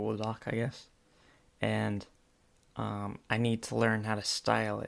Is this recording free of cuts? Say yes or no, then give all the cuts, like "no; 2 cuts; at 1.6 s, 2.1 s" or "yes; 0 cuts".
yes; 0 cuts